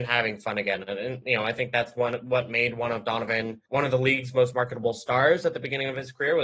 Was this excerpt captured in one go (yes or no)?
no